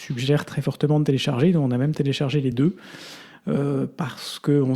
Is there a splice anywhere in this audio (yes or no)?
no